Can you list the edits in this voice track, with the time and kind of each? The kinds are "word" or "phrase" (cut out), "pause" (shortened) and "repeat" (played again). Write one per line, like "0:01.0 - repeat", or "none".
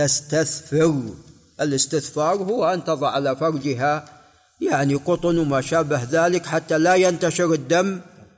none